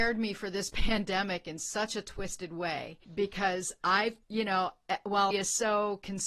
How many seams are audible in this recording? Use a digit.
3